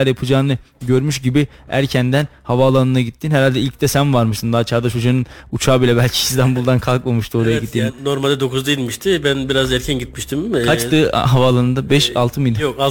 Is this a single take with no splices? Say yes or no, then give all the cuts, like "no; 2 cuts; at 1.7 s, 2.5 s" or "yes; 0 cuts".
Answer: no; 1 cut; at 7.9 s